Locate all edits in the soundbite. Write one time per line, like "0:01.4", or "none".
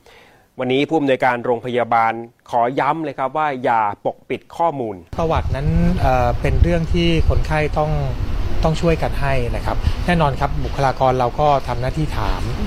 0:05.1

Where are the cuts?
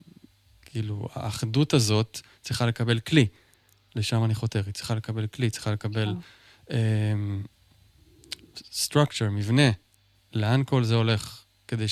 none

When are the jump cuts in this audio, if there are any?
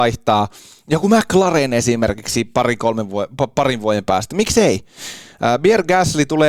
none

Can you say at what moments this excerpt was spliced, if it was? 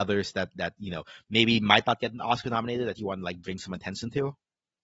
none

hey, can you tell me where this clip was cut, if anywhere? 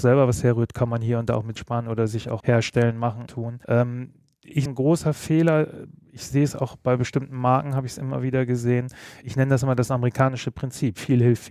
0:01.5
0:02.4
0:03.3
0:03.6
0:04.7
0:09.2

